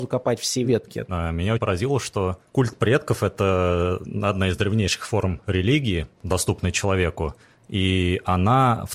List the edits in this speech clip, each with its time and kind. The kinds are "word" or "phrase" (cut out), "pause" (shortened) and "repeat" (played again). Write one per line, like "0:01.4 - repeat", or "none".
0:01.6 - word